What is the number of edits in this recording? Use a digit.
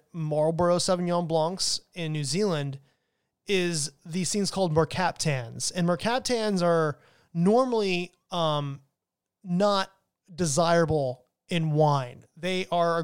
0